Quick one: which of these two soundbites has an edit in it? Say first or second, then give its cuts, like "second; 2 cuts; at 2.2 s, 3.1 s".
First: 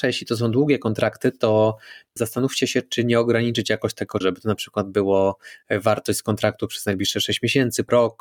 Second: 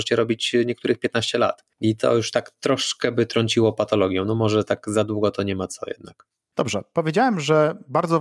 first; 1 cut; at 4.2 s